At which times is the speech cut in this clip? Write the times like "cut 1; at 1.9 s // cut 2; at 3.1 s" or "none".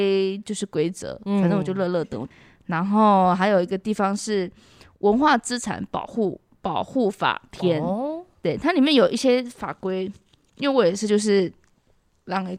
none